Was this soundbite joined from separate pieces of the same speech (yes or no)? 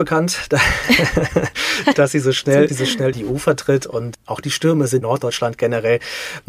yes